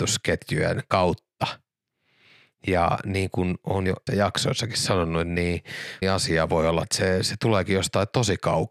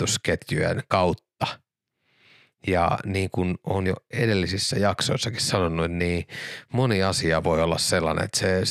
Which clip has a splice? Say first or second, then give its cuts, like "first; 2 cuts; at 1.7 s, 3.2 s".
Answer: first; 3 cuts; at 4.1 s, 6.0 s, 6.8 s